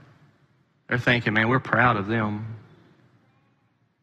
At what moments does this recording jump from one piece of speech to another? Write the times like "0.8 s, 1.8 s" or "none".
none